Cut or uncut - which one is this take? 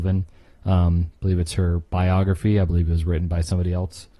uncut